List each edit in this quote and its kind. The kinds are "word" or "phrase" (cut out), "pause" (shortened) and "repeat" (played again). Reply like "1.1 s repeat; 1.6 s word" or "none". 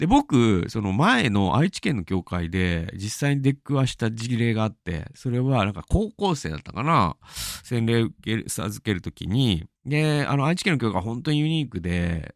9.8 s pause

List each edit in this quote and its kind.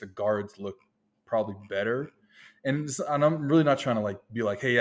none

